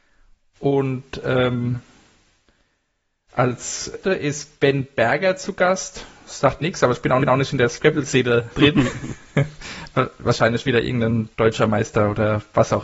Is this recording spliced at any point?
yes; 5 cuts; at 4.0 s, 6.6 s, 7.2 s, 8.5 s, 11.3 s

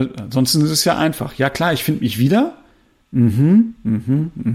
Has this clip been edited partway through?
no; 0 cuts

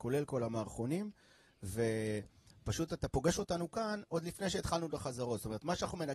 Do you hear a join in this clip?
no; 0 cuts

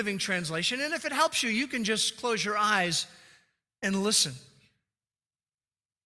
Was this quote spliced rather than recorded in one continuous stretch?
no; 0 cuts

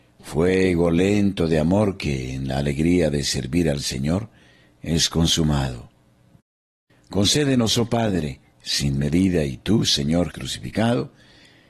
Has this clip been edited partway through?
yes; 1 cut; at 10.3 s

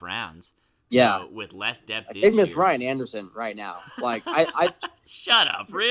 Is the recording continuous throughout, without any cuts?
no; 1 cut; at 2.3 s

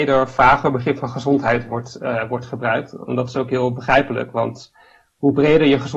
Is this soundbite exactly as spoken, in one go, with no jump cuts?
yes; 0 cuts

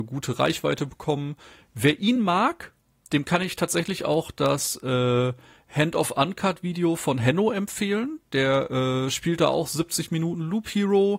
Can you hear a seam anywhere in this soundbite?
no; 0 cuts

